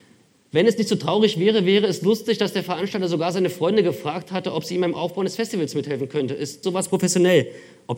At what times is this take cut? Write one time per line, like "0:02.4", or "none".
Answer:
0:06.6